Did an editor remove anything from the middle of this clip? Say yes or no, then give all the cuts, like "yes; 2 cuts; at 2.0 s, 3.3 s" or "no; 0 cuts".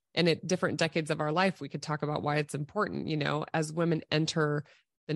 no; 0 cuts